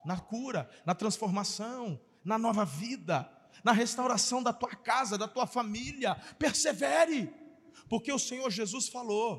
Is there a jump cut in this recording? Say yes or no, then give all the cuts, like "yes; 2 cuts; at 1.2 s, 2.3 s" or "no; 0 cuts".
no; 0 cuts